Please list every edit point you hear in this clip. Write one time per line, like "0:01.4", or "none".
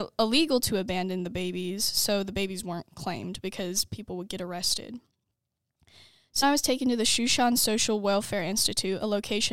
0:06.4